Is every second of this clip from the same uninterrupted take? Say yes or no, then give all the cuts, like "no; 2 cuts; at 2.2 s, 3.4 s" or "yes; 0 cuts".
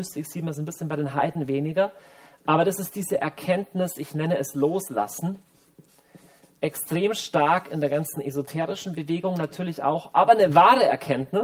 yes; 0 cuts